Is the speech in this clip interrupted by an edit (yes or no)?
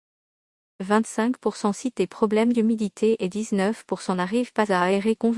no